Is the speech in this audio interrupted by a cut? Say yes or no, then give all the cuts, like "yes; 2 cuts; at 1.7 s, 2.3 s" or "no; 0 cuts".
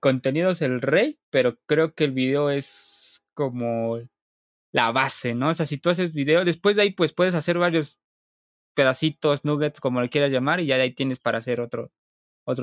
no; 0 cuts